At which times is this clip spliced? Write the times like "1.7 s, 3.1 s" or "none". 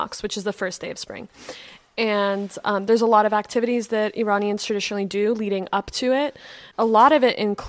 6.7 s

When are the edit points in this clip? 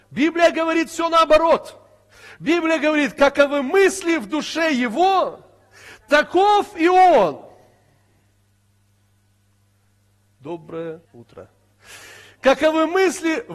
11.0 s

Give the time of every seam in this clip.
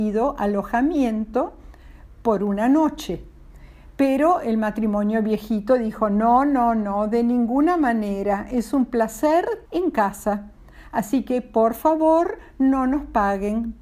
9.6 s

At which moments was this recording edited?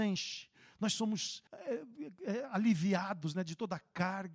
1.5 s

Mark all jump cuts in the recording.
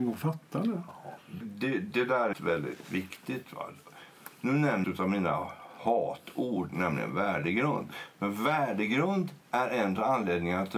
1.4 s, 2.3 s, 4.8 s, 9.4 s

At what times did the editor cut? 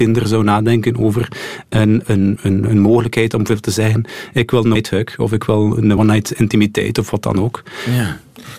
2.0 s, 2.4 s, 4.8 s, 6.0 s

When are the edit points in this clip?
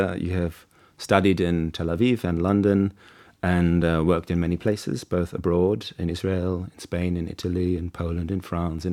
none

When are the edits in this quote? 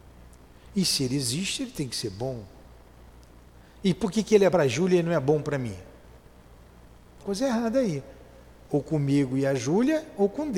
4.5 s, 7.2 s

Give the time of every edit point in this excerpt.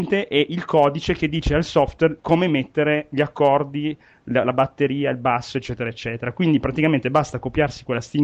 none

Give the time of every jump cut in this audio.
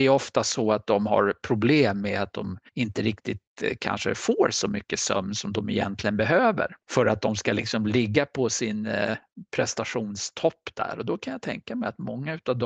2.7 s

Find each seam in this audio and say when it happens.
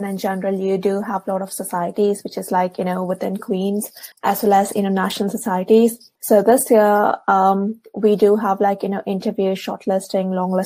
4.1 s, 6.2 s

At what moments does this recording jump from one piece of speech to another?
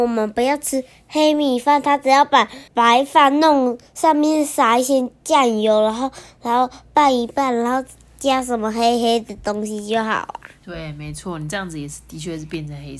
2.7 s

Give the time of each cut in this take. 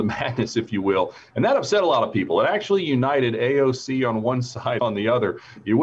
4.8 s

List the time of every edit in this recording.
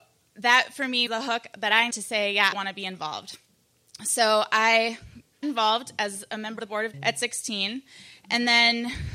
1.1 s, 1.9 s, 2.5 s, 5.4 s, 6.6 s, 6.9 s

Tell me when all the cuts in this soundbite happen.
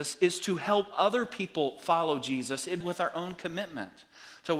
2.8 s

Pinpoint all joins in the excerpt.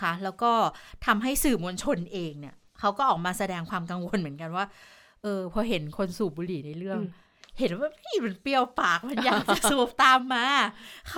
none

